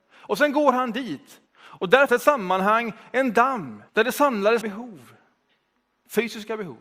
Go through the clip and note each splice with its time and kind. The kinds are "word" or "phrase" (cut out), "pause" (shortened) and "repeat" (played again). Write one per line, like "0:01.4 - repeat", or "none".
0:01.5 - pause
0:02.1 - word
0:03.9 - pause
0:04.6 - phrase